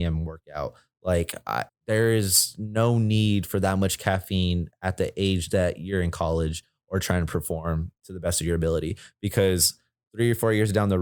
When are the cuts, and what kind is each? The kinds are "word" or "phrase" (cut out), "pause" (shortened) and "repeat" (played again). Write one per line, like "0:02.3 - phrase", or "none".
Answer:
0:01.7 - pause